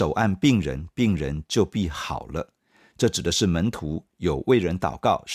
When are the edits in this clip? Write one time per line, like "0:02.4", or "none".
none

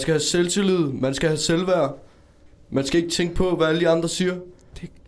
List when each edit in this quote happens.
none

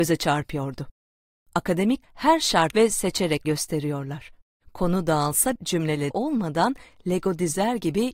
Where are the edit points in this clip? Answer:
0:02.0
0:02.7
0:03.4
0:04.5
0:05.6
0:06.1

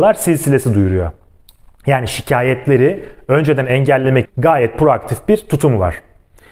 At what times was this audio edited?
0:04.2

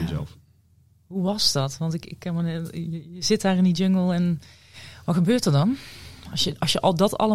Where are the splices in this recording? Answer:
none

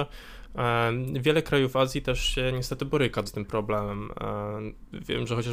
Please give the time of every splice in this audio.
0:03.3

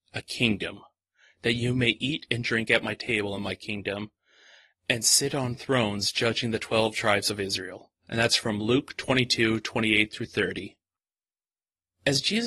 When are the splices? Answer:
none

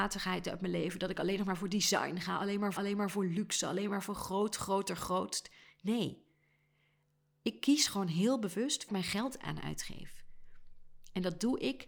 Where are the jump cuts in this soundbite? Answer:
0:02.8
0:08.9

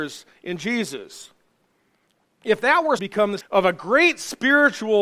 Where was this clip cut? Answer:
0:02.1
0:03.0
0:03.4

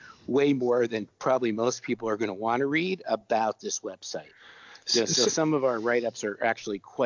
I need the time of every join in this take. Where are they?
none

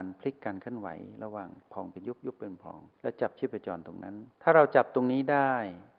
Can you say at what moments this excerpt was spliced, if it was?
0:02.9
0:04.3

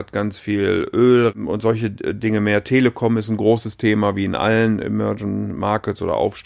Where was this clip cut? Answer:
0:01.3

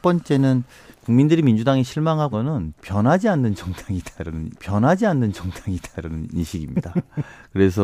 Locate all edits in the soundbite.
0:00.9
0:02.3
0:04.5

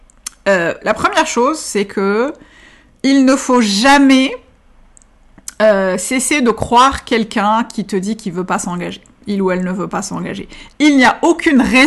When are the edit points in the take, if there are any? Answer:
none

